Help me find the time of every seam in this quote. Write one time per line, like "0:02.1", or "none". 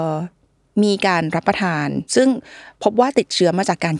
0:02.1
0:02.7

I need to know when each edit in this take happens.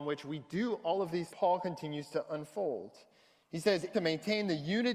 0:01.3
0:03.1
0:03.9

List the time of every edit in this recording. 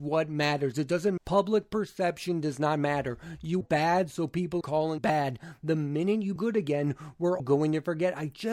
0:01.2
0:03.6
0:04.6
0:05.0
0:06.4
0:07.4

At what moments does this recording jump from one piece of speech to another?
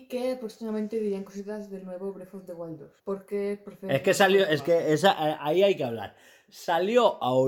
0:03.0

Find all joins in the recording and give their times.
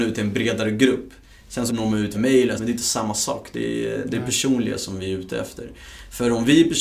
0:01.7
0:02.1
0:02.6

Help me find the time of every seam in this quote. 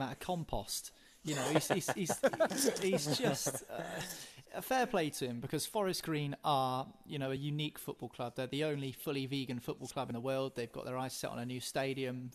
none

